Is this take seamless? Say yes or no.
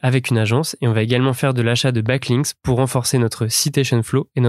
yes